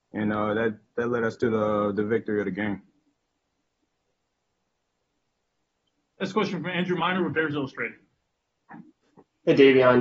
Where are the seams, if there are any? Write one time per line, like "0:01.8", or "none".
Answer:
none